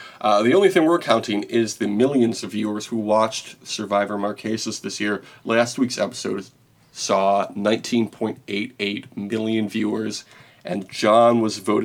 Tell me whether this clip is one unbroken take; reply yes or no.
yes